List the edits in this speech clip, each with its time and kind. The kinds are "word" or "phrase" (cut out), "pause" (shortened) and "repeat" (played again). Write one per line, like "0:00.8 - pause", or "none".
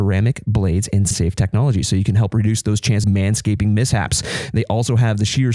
0:01.1 - word
0:03.0 - word